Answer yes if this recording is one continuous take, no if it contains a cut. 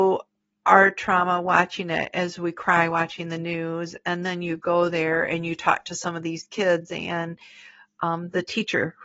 yes